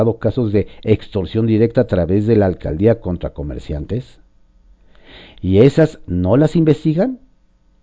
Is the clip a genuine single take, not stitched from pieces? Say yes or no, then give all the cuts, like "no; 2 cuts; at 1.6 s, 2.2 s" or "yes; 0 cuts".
yes; 0 cuts